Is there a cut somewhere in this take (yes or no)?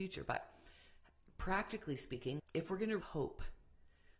yes